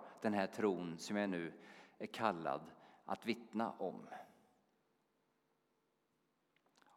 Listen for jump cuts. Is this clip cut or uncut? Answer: uncut